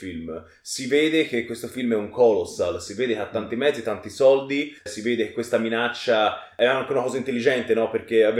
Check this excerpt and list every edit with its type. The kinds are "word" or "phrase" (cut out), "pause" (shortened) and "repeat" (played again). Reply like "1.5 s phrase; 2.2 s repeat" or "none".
4.8 s pause